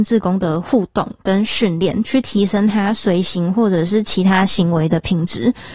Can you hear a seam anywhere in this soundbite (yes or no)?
no